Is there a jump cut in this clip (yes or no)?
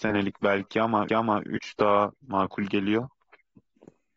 yes